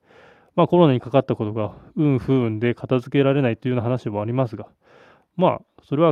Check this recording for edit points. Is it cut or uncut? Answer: uncut